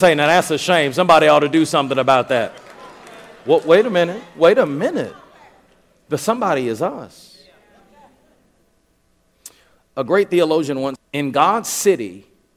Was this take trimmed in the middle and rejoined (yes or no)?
yes